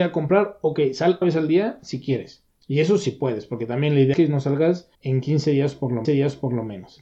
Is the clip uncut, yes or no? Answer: no